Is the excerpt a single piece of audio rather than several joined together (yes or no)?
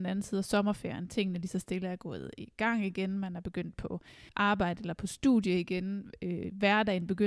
no